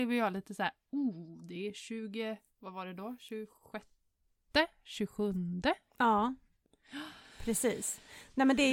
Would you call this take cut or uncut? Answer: uncut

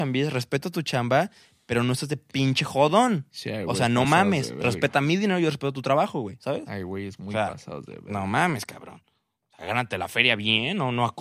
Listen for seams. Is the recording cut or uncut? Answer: uncut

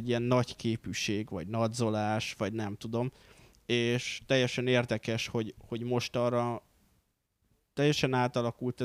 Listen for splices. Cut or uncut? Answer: uncut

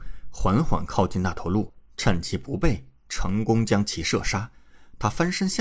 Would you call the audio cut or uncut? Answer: cut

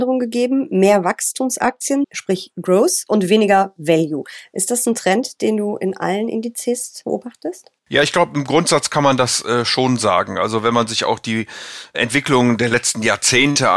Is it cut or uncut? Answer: cut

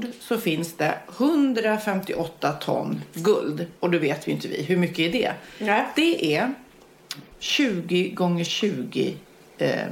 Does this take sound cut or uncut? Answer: cut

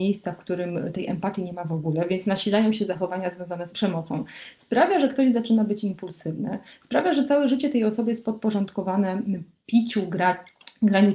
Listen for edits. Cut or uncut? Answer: uncut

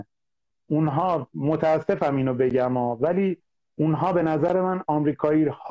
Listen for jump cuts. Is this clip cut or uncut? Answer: uncut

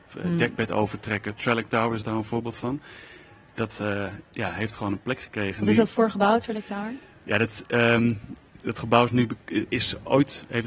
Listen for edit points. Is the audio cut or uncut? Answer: uncut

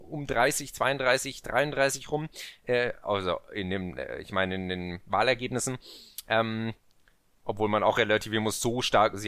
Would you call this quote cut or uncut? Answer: uncut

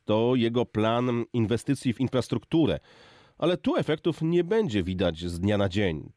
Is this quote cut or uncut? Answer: uncut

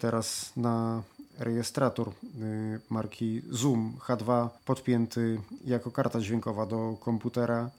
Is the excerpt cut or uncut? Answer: cut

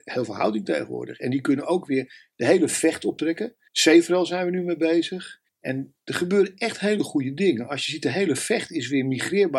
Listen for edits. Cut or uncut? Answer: cut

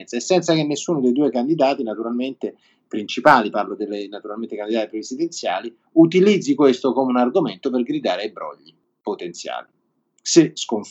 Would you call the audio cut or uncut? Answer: uncut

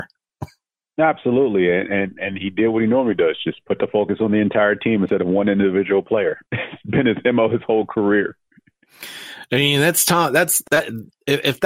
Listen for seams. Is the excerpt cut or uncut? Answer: cut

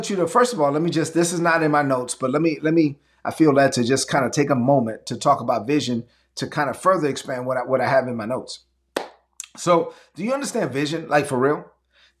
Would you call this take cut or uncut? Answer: uncut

